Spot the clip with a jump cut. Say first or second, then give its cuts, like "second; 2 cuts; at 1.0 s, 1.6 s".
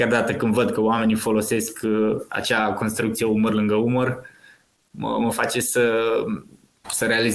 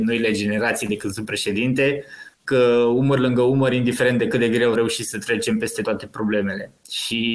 second; 3 cuts; at 2.3 s, 4.8 s, 5.8 s